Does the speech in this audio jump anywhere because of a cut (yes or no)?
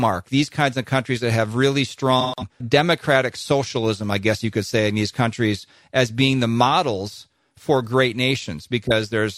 yes